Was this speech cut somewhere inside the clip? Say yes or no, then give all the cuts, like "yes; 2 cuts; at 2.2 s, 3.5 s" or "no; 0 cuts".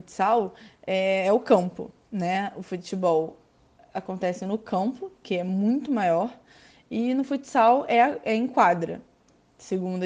no; 0 cuts